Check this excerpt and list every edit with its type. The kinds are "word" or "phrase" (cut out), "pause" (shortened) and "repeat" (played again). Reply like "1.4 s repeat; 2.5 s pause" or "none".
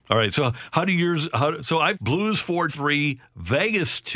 1.9 s word; 2.7 s word